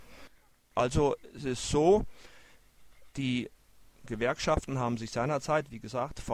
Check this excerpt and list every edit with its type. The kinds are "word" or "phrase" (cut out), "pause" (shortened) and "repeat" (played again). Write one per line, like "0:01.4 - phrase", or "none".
none